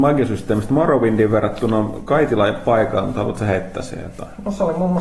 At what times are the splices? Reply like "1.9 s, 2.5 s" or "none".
none